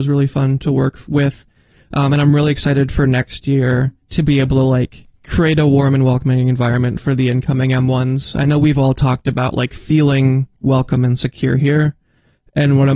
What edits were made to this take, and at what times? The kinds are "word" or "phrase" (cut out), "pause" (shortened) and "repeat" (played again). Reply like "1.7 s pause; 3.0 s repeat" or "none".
4.0 s pause; 5.1 s pause; 10.6 s pause